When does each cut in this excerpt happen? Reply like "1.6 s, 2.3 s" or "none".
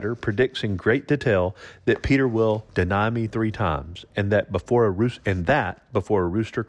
2.7 s